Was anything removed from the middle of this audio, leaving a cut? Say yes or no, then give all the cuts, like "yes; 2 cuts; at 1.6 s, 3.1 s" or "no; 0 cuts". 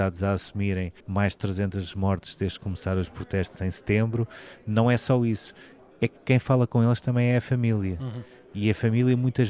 yes; 1 cut; at 1.0 s